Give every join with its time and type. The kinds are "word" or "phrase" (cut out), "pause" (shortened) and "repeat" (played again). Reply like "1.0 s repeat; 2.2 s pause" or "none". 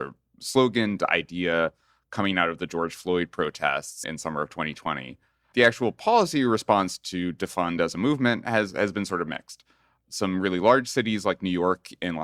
1.0 s word; 4.0 s word; 5.5 s word